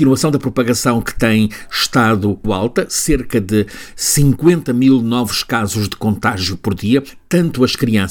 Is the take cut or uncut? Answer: cut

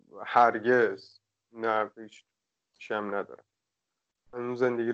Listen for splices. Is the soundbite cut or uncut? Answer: uncut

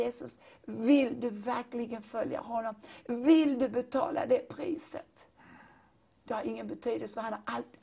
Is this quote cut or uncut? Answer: uncut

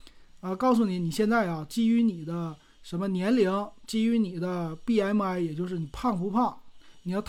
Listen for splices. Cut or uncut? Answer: uncut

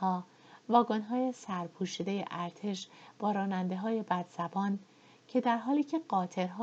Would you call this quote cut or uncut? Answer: uncut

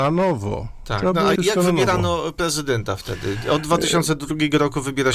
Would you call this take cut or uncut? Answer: cut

